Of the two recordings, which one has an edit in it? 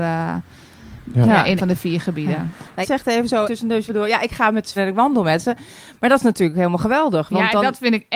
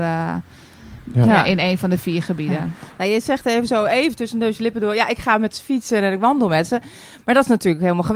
first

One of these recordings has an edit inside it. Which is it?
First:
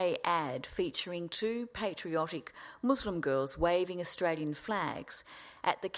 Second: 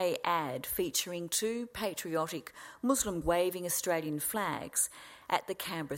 second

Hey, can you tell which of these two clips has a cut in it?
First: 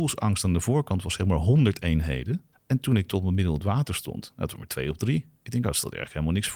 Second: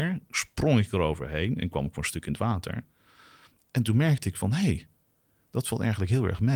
first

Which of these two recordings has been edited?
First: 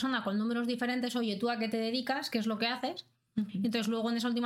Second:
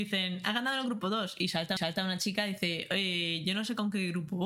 second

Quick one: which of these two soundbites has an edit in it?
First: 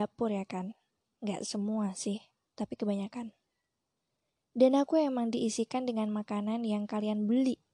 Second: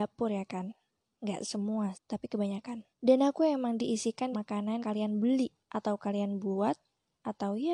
second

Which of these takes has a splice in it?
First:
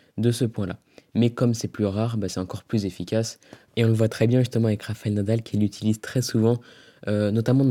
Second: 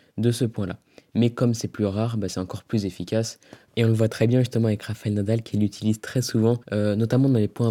second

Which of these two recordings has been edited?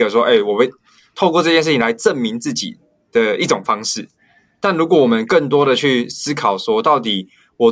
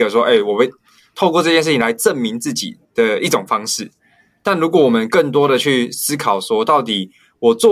second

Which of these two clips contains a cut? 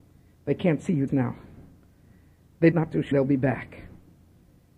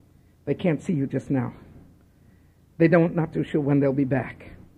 first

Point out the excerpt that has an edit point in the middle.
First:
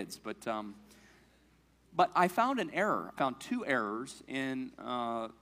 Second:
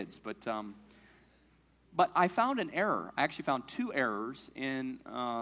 first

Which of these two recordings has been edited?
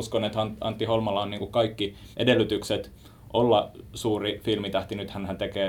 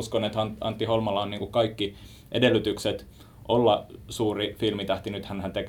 first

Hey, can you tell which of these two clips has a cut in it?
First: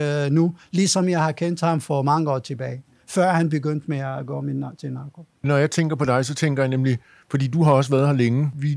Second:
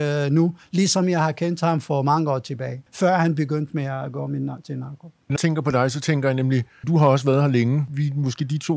second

